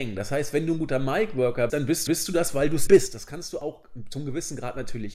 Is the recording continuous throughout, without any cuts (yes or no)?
no